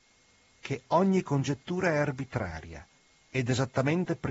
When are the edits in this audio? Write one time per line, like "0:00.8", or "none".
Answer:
none